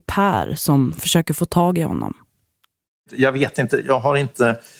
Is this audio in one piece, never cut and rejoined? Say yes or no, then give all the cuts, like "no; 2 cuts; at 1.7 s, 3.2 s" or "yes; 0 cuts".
yes; 0 cuts